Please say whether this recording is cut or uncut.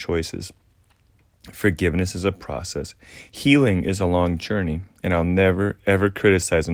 uncut